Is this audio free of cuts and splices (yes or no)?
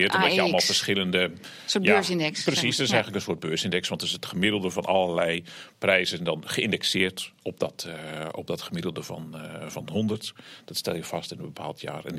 yes